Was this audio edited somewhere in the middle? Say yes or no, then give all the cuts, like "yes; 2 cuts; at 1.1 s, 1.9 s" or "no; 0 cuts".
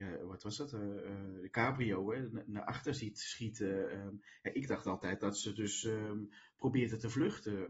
no; 0 cuts